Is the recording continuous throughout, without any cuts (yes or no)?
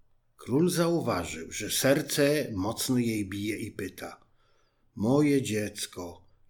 yes